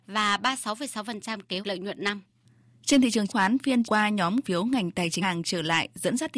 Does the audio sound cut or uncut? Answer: cut